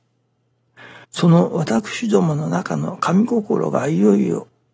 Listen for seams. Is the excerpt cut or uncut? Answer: cut